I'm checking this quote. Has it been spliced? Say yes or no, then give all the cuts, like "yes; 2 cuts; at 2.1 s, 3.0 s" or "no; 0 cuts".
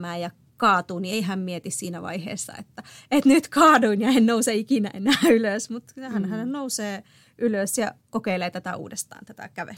no; 0 cuts